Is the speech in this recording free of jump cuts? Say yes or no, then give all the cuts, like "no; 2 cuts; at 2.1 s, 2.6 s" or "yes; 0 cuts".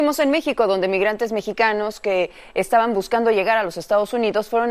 yes; 0 cuts